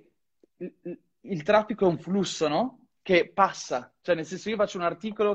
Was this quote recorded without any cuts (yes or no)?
yes